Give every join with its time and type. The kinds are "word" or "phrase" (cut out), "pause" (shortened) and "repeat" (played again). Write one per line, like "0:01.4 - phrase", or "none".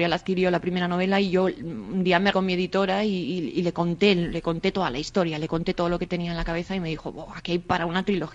0:02.3 - word